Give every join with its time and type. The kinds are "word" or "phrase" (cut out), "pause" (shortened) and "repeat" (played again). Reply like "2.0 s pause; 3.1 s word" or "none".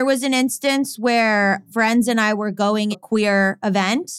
1.7 s word; 2.9 s word